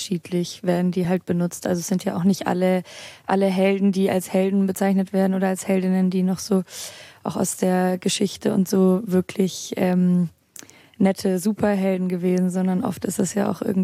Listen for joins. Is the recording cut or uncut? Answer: uncut